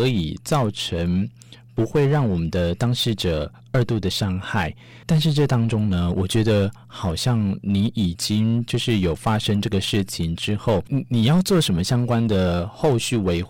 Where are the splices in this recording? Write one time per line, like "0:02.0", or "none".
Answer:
0:05.0